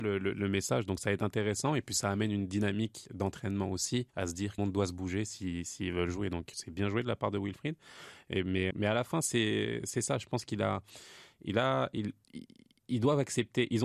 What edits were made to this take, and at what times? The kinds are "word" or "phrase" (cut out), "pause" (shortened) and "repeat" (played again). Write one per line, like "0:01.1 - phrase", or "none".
0:04.1 - pause
0:04.6 - phrase
0:06.5 - word
0:08.7 - word
0:12.2 - pause